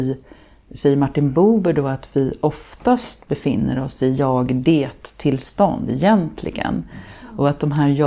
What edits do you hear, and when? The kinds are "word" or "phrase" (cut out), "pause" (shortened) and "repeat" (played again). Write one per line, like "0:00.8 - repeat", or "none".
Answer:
none